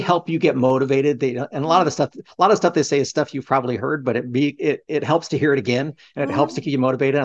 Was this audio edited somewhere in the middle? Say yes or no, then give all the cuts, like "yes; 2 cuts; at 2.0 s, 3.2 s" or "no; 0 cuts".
no; 0 cuts